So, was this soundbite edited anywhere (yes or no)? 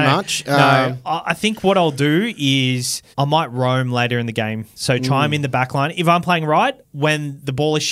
yes